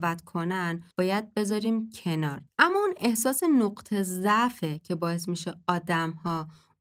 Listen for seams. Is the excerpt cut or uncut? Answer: cut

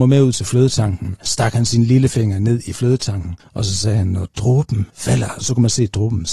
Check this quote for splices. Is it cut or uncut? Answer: cut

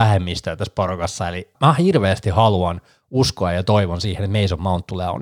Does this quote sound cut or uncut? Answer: cut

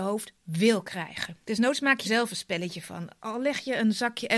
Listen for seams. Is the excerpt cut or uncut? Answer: cut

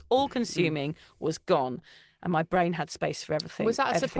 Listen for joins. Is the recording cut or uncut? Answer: uncut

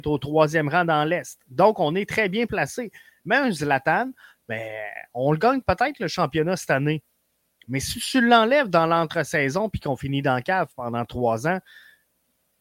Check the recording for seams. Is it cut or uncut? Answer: uncut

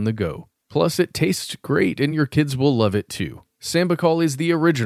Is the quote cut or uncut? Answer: uncut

